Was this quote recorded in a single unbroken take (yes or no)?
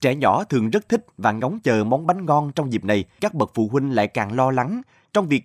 no